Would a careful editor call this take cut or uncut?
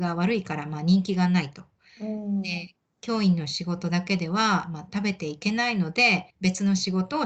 cut